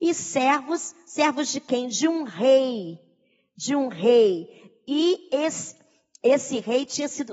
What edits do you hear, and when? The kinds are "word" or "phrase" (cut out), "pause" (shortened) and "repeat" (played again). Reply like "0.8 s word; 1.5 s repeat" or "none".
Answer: none